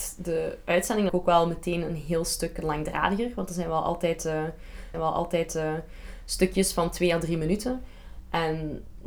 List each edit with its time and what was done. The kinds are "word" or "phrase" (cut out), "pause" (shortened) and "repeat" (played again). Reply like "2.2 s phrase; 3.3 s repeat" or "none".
1.1 s word; 4.9 s repeat